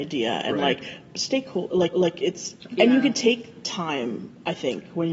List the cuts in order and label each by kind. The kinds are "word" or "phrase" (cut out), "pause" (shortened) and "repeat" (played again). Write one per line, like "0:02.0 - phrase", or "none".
0:01.9 - repeat
0:02.7 - phrase